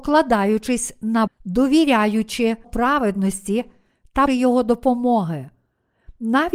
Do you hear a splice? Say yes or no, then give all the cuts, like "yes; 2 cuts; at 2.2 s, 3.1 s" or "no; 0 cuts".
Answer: yes; 3 cuts; at 1.3 s, 2.6 s, 4.3 s